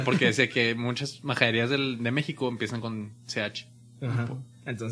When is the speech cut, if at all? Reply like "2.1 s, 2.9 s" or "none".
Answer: none